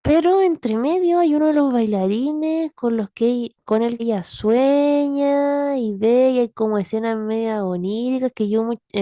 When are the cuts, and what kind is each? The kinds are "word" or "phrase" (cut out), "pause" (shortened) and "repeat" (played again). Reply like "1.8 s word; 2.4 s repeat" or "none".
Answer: 4.0 s word